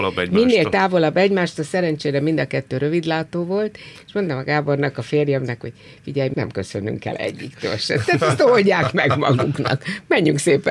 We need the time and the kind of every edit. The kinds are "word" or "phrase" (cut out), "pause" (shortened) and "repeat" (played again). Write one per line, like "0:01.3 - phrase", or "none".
0:06.3 - word